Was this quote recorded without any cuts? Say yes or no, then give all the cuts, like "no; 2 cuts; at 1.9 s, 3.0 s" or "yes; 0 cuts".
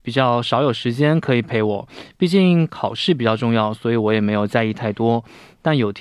yes; 0 cuts